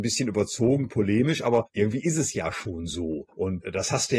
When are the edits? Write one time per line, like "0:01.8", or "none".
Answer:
none